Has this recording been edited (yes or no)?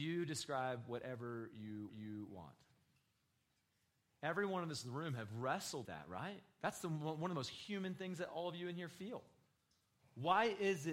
yes